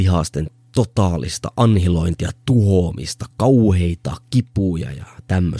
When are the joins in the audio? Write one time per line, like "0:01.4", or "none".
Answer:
none